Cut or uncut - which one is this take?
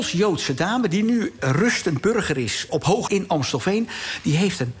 cut